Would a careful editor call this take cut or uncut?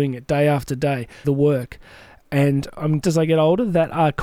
cut